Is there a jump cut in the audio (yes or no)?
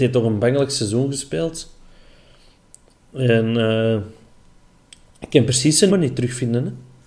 yes